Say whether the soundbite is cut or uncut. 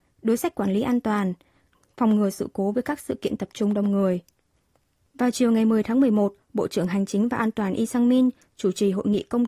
uncut